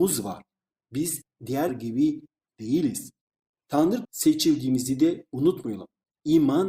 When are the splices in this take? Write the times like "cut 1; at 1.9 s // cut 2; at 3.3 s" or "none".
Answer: cut 1; at 1.7 s // cut 2; at 4.0 s